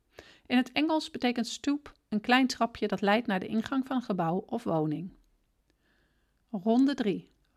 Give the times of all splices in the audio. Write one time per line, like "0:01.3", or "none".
none